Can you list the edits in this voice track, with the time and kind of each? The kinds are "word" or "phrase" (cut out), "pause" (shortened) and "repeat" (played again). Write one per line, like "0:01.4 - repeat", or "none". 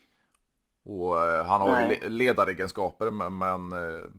none